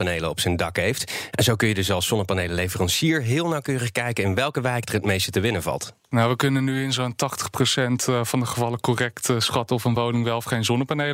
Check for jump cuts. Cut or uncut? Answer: uncut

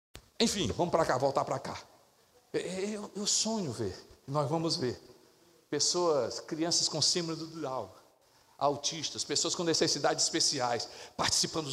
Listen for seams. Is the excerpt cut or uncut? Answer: uncut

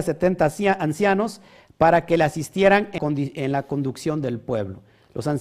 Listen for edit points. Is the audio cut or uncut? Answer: cut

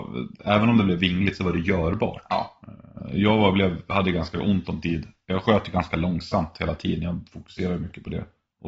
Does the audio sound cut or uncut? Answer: uncut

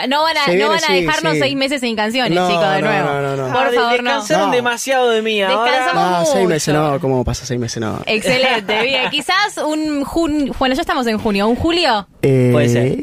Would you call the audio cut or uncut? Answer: uncut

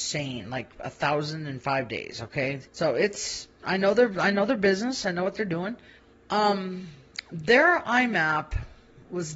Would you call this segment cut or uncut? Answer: cut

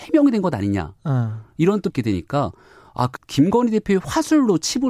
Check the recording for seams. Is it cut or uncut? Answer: cut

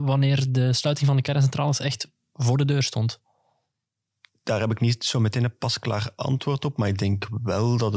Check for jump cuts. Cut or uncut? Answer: uncut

